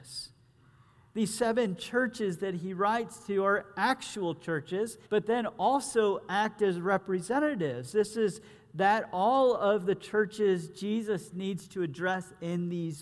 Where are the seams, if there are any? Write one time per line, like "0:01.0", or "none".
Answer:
0:05.1